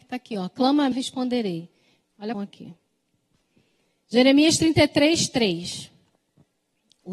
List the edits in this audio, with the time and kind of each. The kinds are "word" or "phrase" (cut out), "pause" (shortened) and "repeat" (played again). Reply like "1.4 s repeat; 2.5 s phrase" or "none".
0.9 s phrase; 2.3 s phrase